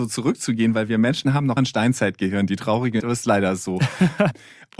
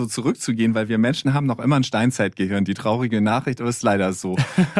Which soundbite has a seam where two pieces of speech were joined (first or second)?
first